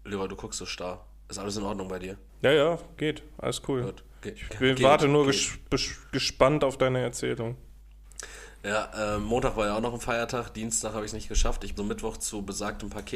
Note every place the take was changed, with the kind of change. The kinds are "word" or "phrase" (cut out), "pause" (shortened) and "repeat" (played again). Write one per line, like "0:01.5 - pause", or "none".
0:11.8 - word